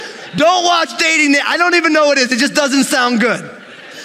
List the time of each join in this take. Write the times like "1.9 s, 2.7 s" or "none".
none